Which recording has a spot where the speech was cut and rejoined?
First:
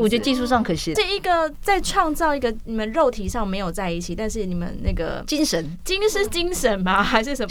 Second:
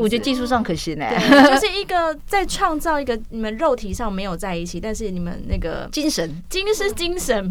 first; 1 cut; at 1.0 s

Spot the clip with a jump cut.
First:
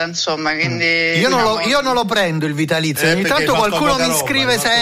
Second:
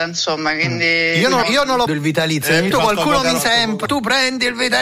second; 5 cuts; at 1.4 s, 1.9 s, 2.7 s, 3.4 s, 3.9 s

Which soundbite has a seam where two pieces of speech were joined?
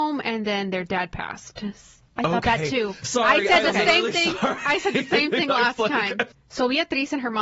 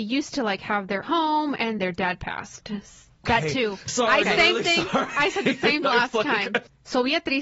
second; 5 cuts; at 1.0 s, 1.8 s, 3.2 s, 4.2 s, 5.8 s

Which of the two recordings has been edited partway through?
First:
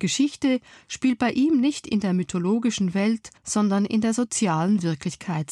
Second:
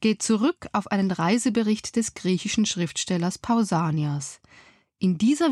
first; 1 cut; at 3.4 s

